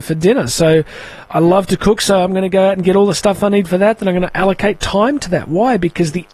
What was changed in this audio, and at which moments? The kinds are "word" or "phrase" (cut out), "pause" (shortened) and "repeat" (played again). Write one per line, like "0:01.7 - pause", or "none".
none